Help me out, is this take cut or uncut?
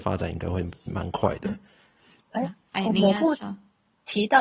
uncut